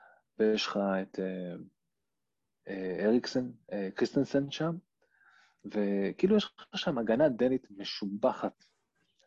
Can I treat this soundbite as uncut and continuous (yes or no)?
yes